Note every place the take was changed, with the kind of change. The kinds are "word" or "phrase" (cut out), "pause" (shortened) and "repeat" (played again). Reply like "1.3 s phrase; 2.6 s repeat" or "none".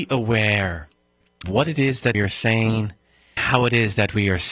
1.4 s word; 2.1 s word; 3.4 s word